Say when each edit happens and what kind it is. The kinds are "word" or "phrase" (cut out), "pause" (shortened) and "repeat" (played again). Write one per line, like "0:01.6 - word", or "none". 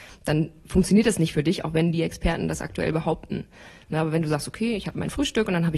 none

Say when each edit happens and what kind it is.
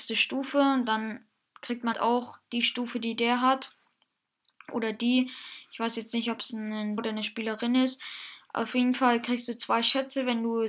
0:01.9 - word
0:07.0 - word

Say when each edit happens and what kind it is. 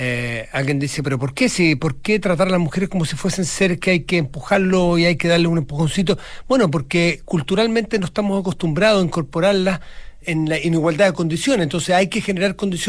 0:01.0 - word
0:10.2 - word

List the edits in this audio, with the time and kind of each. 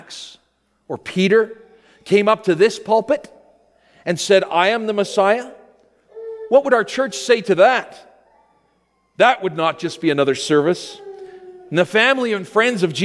none

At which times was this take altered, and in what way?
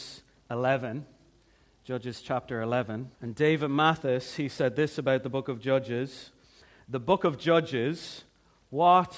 0:03.1 - pause

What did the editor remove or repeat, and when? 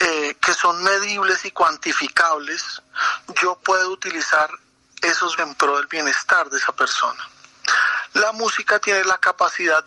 0:05.4 - word

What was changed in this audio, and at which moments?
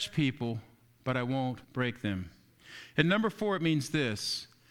0:01.6 - pause

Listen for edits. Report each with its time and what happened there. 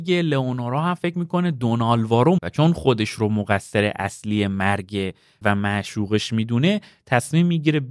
0:02.4 - word
0:05.4 - word

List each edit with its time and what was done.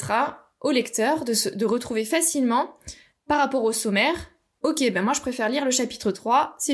none

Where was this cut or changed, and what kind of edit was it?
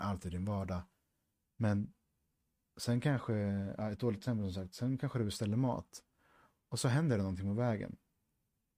none

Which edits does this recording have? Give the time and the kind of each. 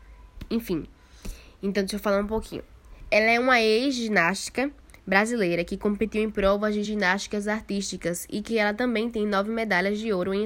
none

